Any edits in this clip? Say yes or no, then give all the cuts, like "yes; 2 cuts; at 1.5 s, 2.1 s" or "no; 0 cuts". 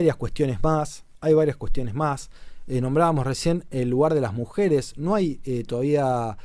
no; 0 cuts